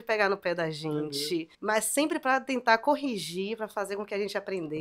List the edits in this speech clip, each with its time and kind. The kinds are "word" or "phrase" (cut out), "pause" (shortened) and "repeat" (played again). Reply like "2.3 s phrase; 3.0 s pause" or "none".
1.5 s pause